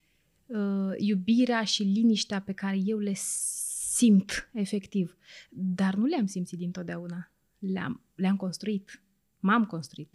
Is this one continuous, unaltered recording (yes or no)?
yes